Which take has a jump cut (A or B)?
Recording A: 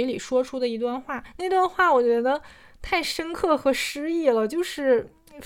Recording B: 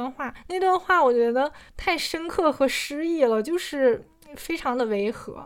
B